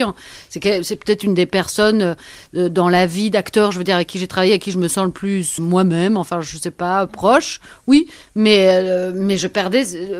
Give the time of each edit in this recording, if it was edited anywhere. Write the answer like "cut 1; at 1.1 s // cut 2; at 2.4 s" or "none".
cut 1; at 5.6 s